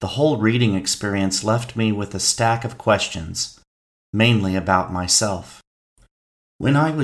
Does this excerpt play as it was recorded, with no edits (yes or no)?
yes